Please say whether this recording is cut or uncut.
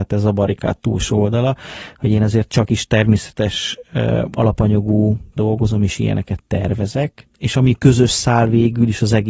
cut